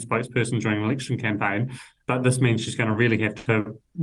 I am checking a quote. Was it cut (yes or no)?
no